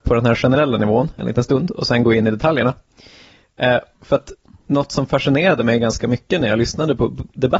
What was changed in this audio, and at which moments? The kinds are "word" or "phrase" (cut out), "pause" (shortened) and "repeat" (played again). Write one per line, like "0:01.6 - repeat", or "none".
none